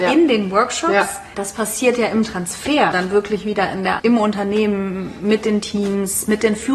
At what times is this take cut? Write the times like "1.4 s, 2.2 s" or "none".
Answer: 1.3 s, 2.9 s, 4.0 s